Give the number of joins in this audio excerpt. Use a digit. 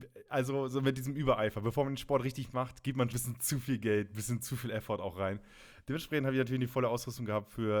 1